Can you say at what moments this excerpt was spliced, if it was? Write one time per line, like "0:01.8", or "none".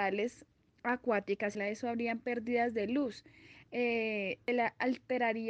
0:01.5